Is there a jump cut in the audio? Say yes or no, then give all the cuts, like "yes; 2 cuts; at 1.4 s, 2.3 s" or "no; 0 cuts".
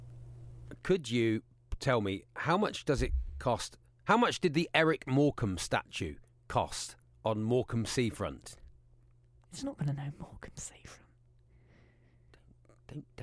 no; 0 cuts